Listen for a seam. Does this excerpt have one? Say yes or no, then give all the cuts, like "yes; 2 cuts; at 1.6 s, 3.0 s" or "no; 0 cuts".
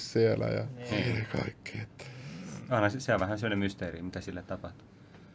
no; 0 cuts